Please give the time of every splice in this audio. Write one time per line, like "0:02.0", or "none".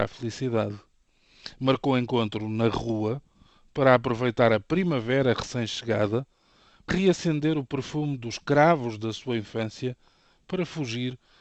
0:06.9